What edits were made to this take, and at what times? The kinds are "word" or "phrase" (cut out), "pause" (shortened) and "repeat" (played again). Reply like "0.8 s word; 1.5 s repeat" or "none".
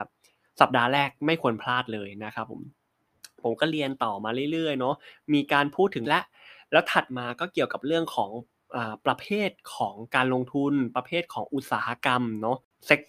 6.0 s word